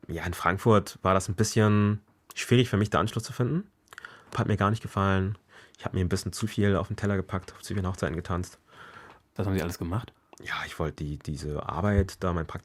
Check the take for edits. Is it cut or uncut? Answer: cut